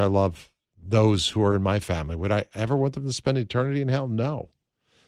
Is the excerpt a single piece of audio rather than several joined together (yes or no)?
yes